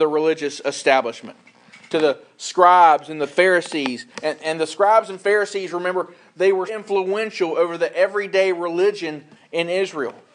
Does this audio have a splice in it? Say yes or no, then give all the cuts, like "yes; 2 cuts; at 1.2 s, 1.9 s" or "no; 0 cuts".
yes; 2 cuts; at 4.1 s, 6.7 s